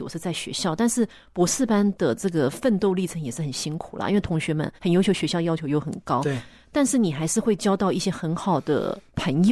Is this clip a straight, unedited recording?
no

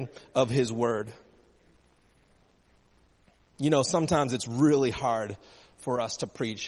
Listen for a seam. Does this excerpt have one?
no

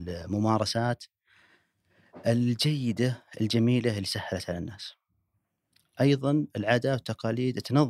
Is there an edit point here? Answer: no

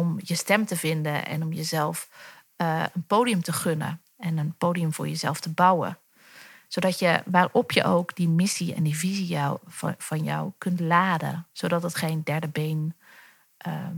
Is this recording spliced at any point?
no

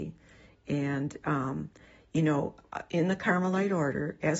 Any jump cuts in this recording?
no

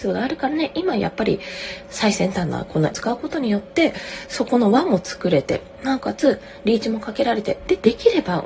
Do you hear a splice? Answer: yes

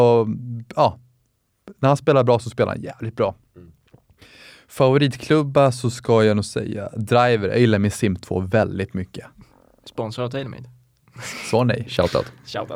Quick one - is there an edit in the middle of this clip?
no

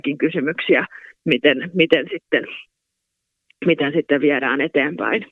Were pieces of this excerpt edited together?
no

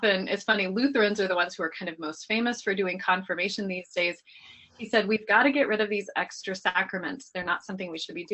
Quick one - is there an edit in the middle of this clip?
no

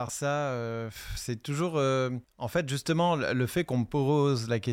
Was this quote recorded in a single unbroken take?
no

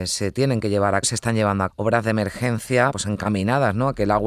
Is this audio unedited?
no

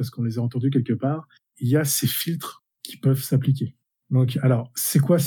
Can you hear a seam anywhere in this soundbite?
no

